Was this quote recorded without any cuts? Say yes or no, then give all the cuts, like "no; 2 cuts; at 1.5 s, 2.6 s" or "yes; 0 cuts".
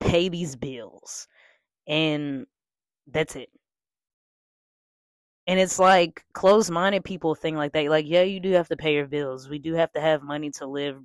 yes; 0 cuts